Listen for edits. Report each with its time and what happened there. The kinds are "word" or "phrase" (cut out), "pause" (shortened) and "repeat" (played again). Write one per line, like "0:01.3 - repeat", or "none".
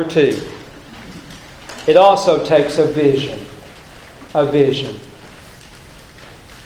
0:04.3 - pause

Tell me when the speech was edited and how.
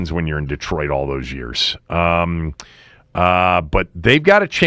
none

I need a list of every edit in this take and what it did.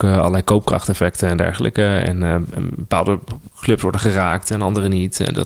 0:03.5 - pause

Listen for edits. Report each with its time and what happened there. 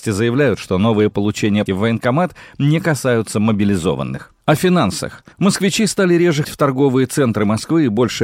0:01.1 - word
0:01.7 - phrase
0:04.4 - pause
0:05.3 - pause
0:06.4 - word

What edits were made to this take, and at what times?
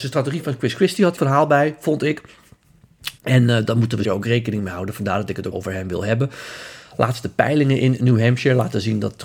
0:01.2 - phrase
0:03.2 - pause
0:04.0 - word
0:05.5 - word

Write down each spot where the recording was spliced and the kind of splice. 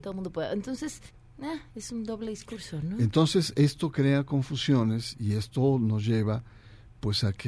0:01.1 - pause

